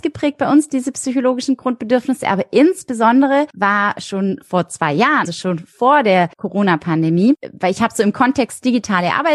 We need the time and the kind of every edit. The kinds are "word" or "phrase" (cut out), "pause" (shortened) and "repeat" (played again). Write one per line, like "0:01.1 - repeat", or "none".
0:03.5 - pause
0:05.3 - word
0:06.3 - pause